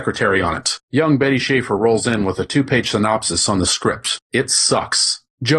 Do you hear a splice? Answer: no; 0 cuts

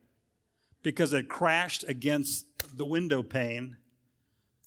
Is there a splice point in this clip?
no; 0 cuts

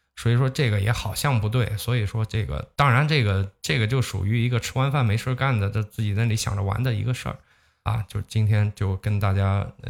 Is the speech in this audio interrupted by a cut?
no; 0 cuts

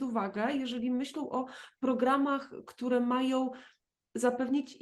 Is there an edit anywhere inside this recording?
no; 0 cuts

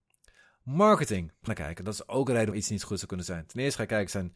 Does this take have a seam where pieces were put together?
yes; 2 cuts; at 1.5 s, 2.5 s

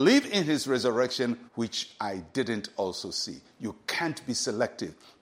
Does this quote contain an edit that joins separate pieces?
yes; 1 cut; at 1.5 s

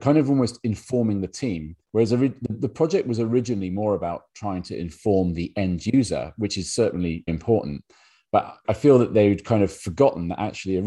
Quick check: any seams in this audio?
yes; 3 cuts; at 1.8 s, 7.3 s, 8.6 s

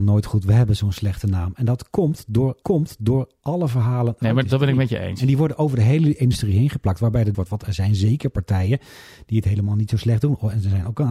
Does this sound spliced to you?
yes; 3 cuts; at 2.6 s, 4.4 s, 7.3 s

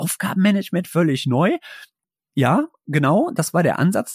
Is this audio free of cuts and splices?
yes; 0 cuts

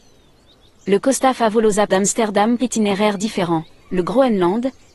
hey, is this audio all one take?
no; 2 cuts; at 1.9 s, 2.6 s

